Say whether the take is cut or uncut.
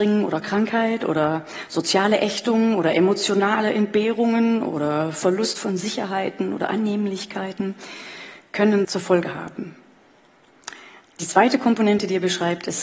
cut